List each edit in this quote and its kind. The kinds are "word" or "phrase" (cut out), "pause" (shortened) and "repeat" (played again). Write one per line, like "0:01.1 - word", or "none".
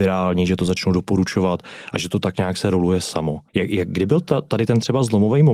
0:03.5 - pause